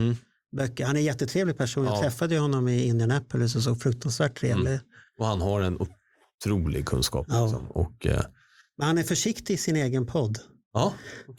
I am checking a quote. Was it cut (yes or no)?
no